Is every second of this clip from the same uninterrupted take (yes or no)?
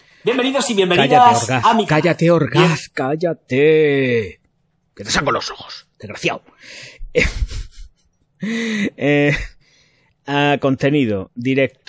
yes